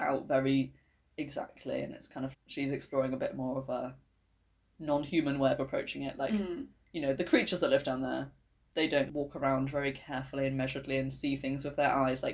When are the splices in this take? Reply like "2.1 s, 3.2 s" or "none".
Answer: 2.3 s

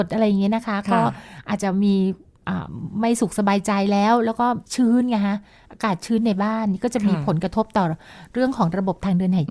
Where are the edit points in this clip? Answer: 4.7 s

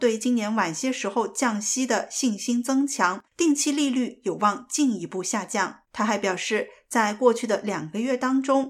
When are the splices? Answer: 3.3 s, 5.8 s

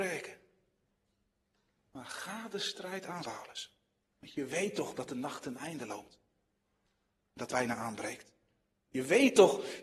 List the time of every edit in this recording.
3.2 s, 4.0 s, 7.5 s

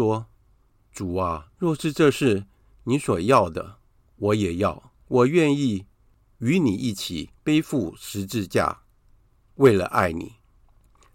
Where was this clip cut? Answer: 1.5 s, 5.0 s, 7.4 s

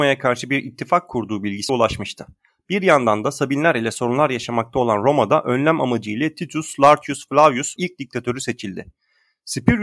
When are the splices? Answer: 1.7 s, 7.8 s

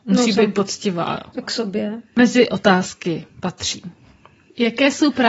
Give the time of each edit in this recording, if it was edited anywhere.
1.4 s, 3.3 s

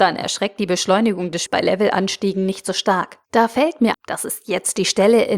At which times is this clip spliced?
1.5 s, 3.2 s, 3.9 s

